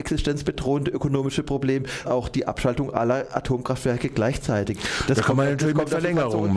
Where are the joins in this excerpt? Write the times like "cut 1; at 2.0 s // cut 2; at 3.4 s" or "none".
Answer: cut 1; at 2.0 s